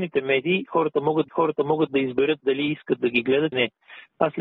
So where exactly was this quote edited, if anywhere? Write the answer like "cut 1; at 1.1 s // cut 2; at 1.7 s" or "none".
cut 1; at 1.3 s // cut 2; at 3.5 s